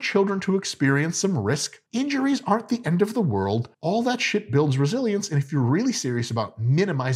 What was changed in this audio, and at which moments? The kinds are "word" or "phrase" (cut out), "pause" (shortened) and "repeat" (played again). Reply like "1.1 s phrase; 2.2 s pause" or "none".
1.9 s pause; 3.7 s pause